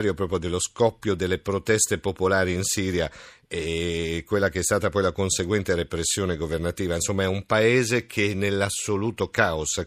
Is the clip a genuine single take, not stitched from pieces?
yes; 0 cuts

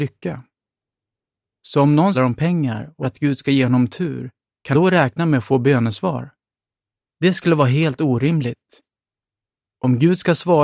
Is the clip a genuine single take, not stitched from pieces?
no; 3 cuts; at 2.1 s, 3.0 s, 4.7 s

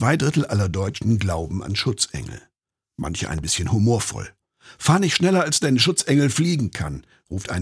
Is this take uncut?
yes; 0 cuts

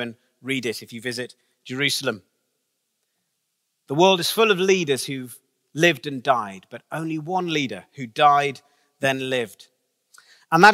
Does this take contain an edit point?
no; 0 cuts

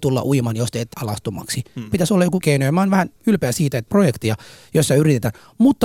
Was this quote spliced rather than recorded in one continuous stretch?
yes; 4 cuts; at 0.9 s, 2.4 s, 3.2 s, 3.9 s

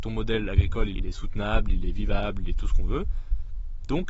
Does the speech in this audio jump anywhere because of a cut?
yes; 1 cut; at 0.9 s

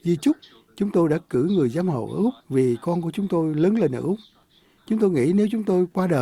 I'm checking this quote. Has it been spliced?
yes; 1 cut; at 2.4 s

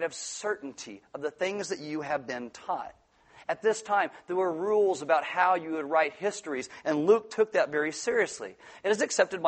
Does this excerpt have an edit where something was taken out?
no; 0 cuts

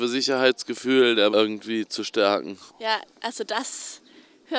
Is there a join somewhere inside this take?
yes; 2 cuts; at 1.3 s, 2.7 s

